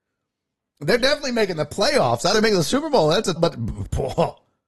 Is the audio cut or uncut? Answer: cut